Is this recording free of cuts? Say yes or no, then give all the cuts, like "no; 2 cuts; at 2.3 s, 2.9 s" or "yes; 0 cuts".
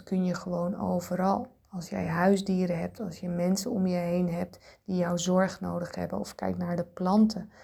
no; 1 cut; at 1.6 s